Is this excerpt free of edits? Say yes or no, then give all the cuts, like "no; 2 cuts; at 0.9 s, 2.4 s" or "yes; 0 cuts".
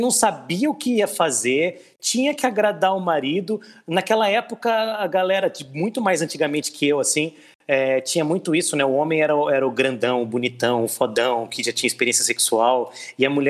yes; 0 cuts